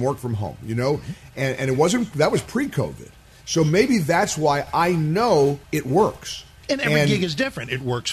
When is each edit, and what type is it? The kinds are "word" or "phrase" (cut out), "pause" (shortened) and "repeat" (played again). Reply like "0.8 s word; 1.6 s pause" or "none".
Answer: 5.6 s pause